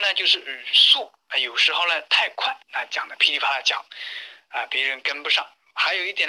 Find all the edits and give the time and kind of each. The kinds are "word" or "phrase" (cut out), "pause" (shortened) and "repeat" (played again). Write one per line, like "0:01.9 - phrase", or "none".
0:02.6 - pause